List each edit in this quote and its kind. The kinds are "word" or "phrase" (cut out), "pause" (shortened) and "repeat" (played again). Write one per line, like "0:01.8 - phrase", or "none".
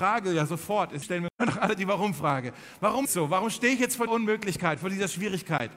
0:01.0 - word
0:03.0 - phrase
0:04.1 - word